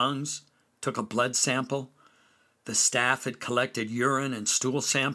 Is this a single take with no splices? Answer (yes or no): yes